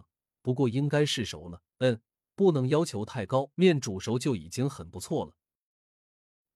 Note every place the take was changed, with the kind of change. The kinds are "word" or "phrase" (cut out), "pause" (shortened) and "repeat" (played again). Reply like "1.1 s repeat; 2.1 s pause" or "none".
1.7 s pause; 3.5 s pause